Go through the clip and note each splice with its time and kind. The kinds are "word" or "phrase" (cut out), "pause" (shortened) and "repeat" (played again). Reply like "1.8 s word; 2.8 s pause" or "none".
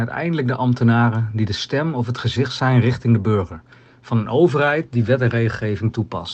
none